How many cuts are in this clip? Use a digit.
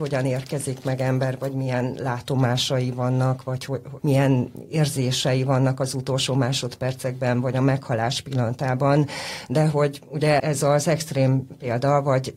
2